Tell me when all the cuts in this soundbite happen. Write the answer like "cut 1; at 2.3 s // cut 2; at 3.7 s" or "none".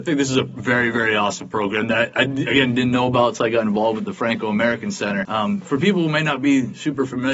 none